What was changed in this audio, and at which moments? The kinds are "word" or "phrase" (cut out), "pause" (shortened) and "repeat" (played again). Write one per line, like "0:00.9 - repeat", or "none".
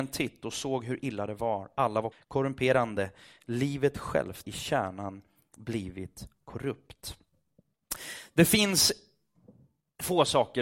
0:02.1 - phrase
0:04.4 - word